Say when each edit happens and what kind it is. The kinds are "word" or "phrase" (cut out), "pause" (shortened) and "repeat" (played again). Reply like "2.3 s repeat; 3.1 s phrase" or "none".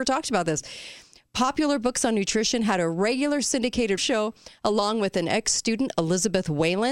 4.0 s word